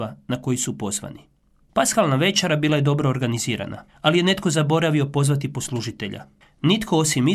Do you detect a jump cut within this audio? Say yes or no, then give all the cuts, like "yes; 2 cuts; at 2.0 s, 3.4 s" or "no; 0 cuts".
yes; 1 cut; at 3.9 s